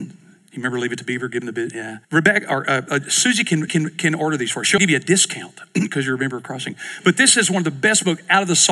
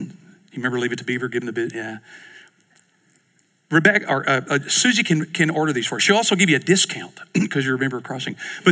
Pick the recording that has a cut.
first; 3 cuts; at 2.0 s, 3.7 s, 4.8 s

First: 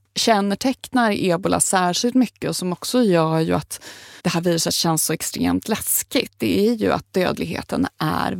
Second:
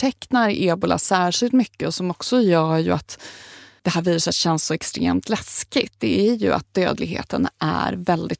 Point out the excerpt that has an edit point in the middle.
first; 1 cut; at 4.2 s

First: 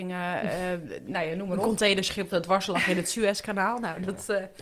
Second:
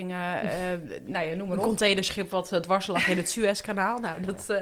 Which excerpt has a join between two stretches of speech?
first; 1 cut; at 2.3 s

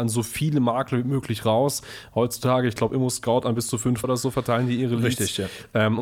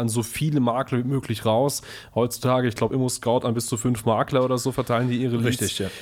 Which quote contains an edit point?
first; 1 cut; at 4.0 s

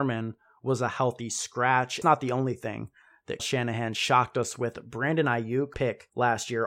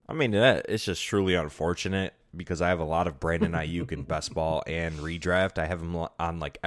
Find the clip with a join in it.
first; 3 cuts; at 2.0 s, 3.4 s, 5.7 s

